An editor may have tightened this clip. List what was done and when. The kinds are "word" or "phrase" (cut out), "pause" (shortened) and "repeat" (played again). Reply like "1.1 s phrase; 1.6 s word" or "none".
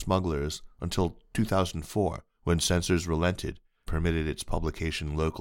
2.3 s pause; 3.9 s word